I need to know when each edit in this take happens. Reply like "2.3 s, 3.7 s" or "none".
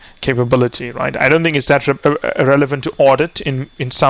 none